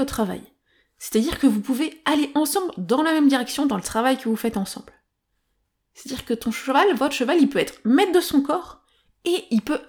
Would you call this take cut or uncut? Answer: uncut